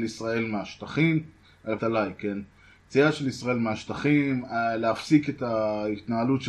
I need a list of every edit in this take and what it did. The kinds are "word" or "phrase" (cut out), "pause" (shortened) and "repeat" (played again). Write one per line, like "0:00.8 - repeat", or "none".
0:01.8 - word